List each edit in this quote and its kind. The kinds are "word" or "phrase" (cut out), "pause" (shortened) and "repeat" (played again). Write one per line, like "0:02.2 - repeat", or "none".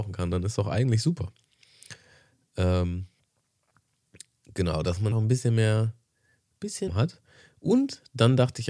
0:05.1 - phrase
0:06.9 - phrase